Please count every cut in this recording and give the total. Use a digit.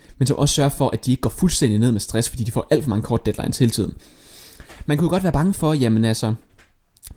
0